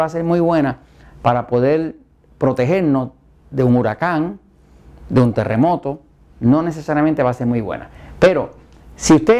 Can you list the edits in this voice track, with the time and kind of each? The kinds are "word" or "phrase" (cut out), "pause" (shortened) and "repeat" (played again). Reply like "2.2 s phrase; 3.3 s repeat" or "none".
none

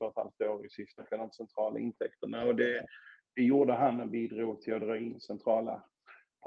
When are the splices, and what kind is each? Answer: 1.0 s word

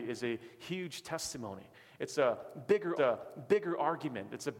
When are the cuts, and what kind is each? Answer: 3.0 s repeat

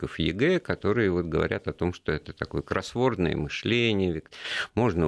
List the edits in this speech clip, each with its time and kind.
none

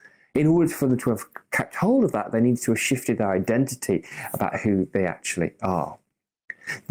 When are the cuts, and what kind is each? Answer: none

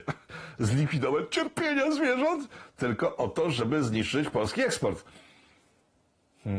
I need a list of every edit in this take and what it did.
none

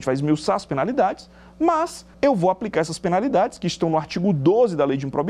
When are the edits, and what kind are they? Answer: 2.1 s pause

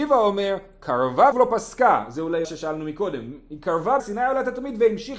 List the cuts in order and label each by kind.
1.3 s word; 2.4 s phrase; 4.0 s word

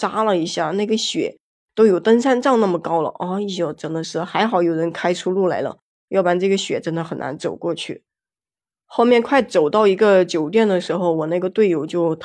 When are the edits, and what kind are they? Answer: none

